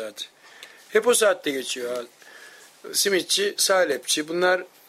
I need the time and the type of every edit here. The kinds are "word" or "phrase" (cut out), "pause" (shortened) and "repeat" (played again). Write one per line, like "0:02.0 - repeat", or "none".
none